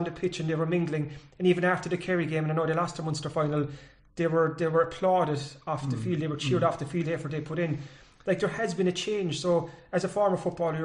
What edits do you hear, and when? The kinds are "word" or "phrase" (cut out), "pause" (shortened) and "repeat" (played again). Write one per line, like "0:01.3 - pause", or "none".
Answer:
0:07.0 - phrase